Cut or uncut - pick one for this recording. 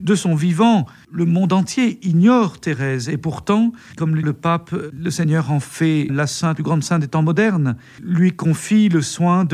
cut